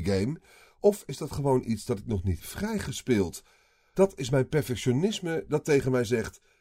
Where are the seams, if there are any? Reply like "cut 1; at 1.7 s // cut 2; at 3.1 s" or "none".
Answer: cut 1; at 2.4 s